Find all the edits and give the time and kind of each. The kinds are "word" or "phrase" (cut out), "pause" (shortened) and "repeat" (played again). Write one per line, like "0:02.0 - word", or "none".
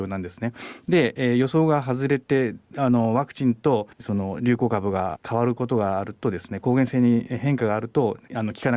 0:03.9 - pause